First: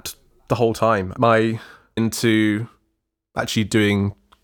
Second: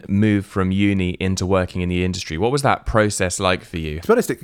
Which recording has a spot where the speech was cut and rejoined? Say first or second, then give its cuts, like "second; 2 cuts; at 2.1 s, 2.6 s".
first; 2 cuts; at 1.2 s, 2.0 s